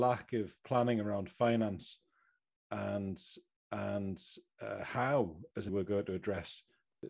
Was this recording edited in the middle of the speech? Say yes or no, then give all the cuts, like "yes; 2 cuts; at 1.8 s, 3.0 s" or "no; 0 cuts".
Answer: yes; 2 cuts; at 3.5 s, 5.7 s